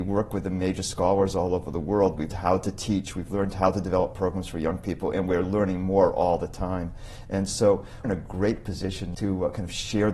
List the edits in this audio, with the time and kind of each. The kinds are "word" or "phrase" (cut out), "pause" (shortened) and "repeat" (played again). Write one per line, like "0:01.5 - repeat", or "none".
0:02.3 - word
0:08.0 - word
0:09.1 - word